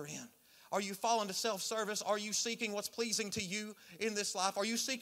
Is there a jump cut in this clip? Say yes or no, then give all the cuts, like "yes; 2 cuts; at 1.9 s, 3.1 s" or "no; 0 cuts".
no; 0 cuts